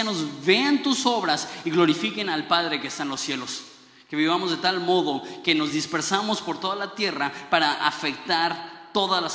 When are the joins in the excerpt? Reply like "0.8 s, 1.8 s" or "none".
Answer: none